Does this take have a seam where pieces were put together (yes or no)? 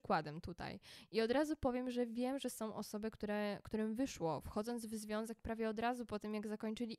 no